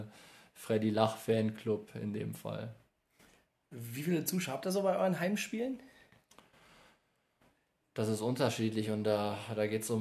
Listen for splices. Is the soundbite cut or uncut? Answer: uncut